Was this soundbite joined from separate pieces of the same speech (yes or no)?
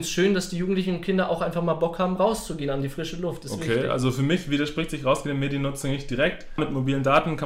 no